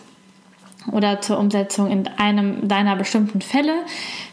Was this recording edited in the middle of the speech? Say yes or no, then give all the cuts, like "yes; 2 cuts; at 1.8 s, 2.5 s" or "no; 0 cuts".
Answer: no; 0 cuts